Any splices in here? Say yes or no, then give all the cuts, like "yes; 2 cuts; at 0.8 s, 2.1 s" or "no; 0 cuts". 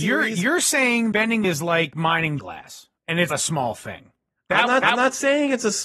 yes; 5 cuts; at 1.1 s, 1.4 s, 2.4 s, 3.3 s, 4.8 s